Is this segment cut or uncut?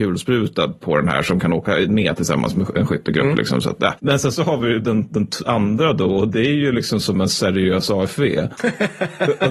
uncut